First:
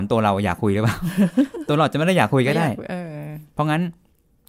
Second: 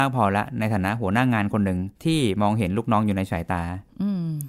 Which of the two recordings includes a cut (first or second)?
second